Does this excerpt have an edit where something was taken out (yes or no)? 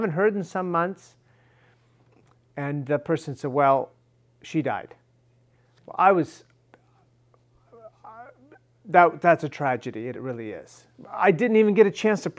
no